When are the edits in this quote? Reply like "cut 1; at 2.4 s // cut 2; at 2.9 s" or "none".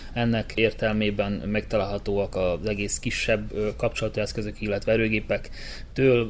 none

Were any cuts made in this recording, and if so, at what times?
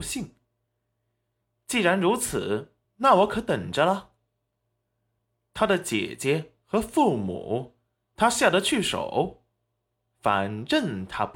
cut 1; at 2.8 s

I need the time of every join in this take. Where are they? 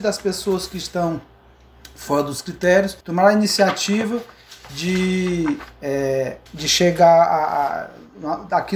cut 1; at 3.0 s // cut 2; at 6.5 s

